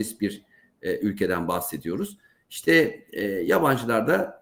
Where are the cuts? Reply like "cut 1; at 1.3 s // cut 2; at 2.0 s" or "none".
none